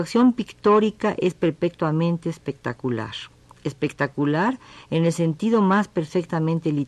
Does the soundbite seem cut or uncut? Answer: uncut